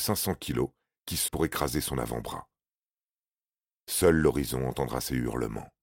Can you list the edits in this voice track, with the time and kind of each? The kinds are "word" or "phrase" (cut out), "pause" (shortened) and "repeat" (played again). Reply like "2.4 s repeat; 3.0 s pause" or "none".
1.3 s word

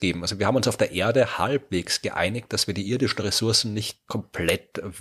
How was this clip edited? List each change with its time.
none

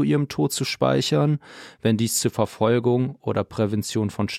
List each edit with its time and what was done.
none

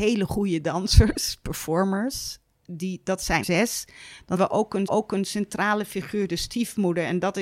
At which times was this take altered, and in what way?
2.5 s pause; 3.4 s word; 4.3 s word; 4.9 s repeat

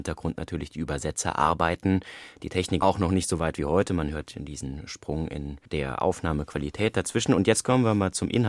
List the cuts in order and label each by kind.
2.8 s word; 5.7 s pause

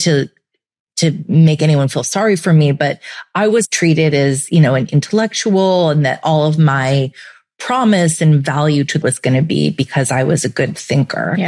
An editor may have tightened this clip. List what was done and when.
3.6 s word; 9.0 s word

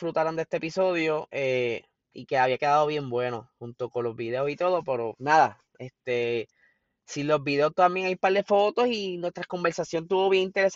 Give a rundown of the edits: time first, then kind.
none

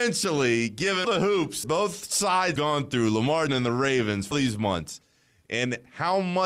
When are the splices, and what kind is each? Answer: 1.0 s word; 1.6 s word; 2.6 s word; 3.5 s word; 4.3 s word

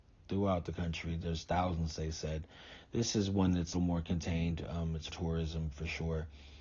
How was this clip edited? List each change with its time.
3.7 s word; 5.1 s word

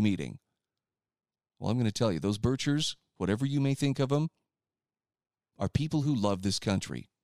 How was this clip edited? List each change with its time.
none

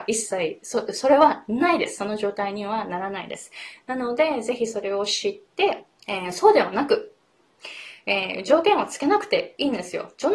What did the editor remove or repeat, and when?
5.9 s pause

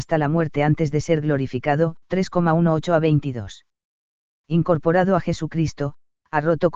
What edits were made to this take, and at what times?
2.0 s pause

